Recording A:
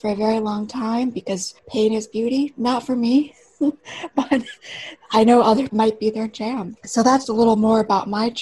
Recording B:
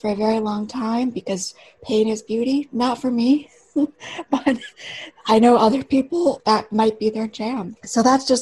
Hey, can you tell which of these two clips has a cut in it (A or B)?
A